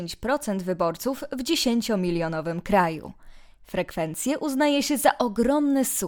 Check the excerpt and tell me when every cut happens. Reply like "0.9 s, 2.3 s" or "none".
none